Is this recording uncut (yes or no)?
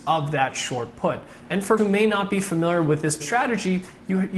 no